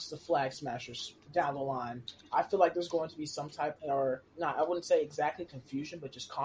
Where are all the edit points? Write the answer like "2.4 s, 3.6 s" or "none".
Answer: 3.8 s, 4.3 s